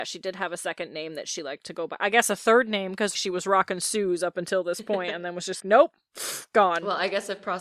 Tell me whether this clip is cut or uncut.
cut